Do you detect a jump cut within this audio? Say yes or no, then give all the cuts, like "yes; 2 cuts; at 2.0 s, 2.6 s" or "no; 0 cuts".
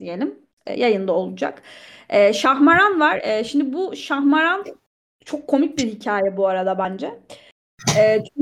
no; 0 cuts